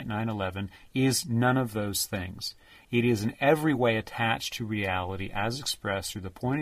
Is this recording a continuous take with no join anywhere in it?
yes; 0 cuts

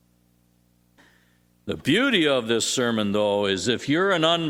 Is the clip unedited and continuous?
yes; 0 cuts

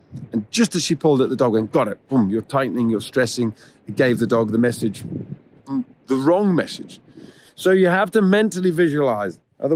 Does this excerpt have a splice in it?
no; 0 cuts

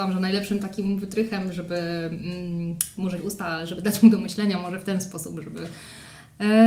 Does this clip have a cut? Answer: yes; 1 cut; at 3.2 s

